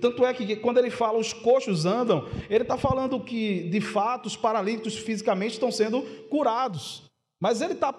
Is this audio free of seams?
yes; 0 cuts

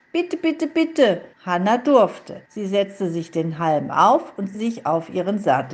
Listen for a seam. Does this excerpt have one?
yes; 3 cuts; at 1.3 s, 2.5 s, 4.5 s

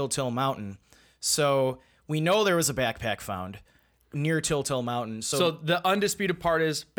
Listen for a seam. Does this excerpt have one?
no; 0 cuts

